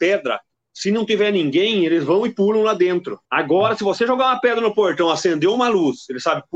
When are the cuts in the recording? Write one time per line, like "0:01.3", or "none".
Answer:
0:03.2

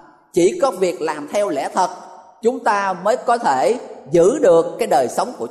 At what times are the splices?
none

